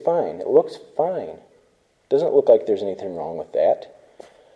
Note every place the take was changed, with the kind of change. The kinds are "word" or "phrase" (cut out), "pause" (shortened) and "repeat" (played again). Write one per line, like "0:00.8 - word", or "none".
none